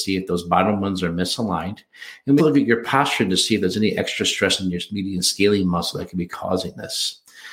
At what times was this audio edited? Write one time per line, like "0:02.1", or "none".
0:02.4